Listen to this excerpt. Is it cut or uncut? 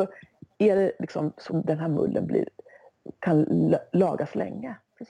cut